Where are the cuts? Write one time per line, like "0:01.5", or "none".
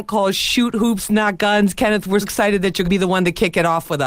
0:02.2
0:02.8